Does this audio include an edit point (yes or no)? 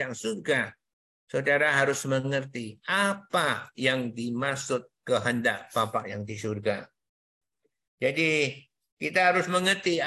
no